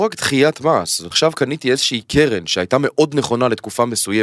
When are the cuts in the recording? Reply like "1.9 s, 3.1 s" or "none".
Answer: 1.1 s